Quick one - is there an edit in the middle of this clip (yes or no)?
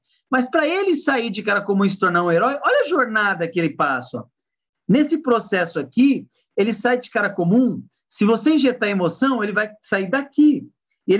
no